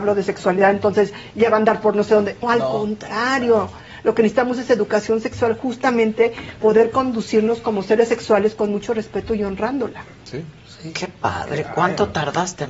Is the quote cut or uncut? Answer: cut